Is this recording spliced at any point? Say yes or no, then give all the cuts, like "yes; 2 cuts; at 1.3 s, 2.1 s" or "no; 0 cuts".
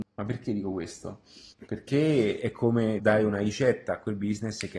yes; 2 cuts; at 1.5 s, 3.0 s